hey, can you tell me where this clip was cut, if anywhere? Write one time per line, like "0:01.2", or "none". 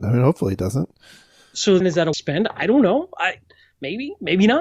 0:01.8
0:02.1